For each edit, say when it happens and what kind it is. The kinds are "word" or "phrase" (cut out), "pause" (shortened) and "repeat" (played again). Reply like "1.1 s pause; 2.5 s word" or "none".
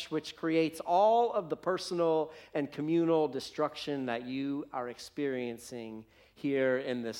none